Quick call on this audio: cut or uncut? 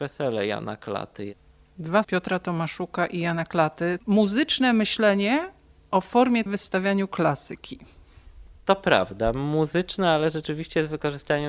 cut